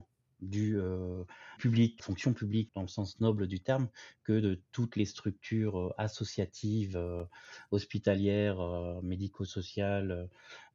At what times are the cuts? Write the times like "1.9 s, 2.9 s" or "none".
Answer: 1.6 s, 2.0 s, 2.7 s